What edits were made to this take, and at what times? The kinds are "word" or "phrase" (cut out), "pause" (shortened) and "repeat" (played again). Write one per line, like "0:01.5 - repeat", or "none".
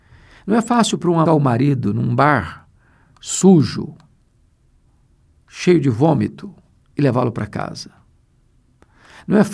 0:01.3 - phrase